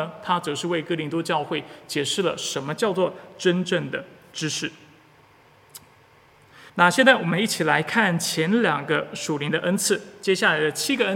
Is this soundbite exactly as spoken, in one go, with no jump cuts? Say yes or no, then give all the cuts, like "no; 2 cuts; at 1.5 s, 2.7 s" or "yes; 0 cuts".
no; 1 cut; at 6.7 s